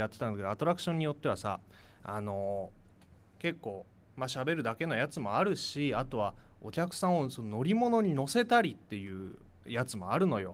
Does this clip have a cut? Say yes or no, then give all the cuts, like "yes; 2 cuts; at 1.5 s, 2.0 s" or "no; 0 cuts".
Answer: no; 0 cuts